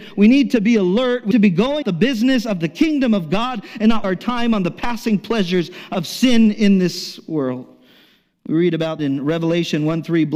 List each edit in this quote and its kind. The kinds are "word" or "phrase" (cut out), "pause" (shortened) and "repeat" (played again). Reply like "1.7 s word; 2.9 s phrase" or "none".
1.3 s word; 1.8 s word; 4.0 s word; 9.0 s word